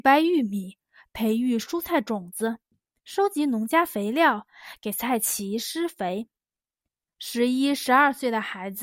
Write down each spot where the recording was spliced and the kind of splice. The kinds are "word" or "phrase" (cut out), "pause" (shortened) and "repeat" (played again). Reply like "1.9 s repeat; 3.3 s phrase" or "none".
none